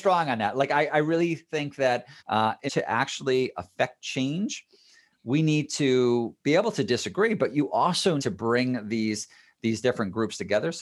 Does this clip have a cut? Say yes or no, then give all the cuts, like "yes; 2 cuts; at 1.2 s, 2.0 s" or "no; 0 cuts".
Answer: yes; 4 cuts; at 2.2 s, 2.7 s, 6.4 s, 8.2 s